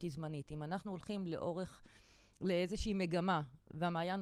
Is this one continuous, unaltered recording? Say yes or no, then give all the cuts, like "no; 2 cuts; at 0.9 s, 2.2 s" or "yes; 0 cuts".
yes; 0 cuts